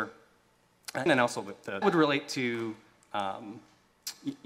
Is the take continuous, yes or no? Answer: no